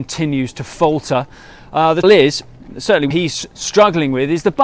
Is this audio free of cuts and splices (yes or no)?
no